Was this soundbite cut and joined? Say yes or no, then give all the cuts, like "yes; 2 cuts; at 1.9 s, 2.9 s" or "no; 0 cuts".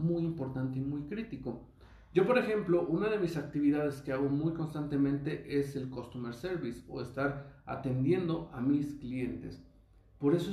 no; 0 cuts